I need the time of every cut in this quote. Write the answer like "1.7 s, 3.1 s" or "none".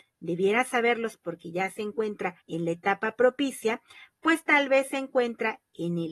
2.4 s